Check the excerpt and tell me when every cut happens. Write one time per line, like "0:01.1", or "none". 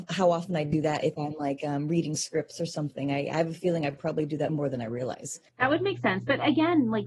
0:04.5
0:05.5